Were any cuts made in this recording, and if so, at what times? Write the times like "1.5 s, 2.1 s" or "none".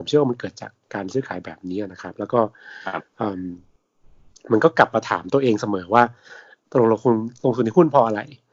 none